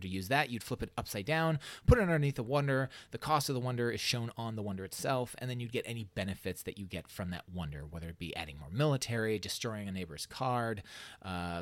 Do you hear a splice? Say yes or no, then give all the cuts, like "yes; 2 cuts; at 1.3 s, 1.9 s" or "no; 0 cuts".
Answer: no; 0 cuts